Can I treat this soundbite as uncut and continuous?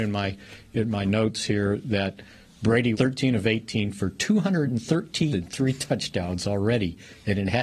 no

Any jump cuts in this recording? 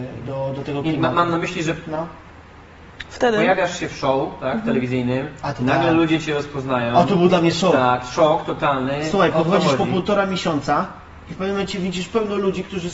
no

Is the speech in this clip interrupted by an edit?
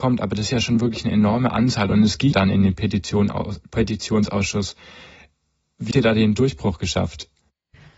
yes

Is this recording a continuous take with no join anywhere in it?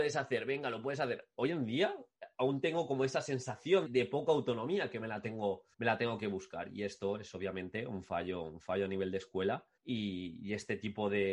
no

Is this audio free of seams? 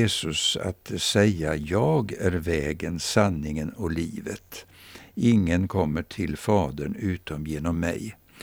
yes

